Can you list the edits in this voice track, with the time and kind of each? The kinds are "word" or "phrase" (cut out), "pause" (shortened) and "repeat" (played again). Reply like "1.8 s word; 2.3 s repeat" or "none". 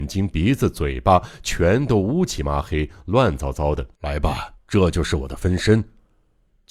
3.9 s pause; 4.5 s pause